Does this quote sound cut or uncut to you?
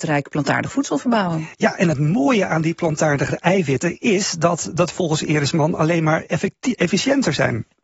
uncut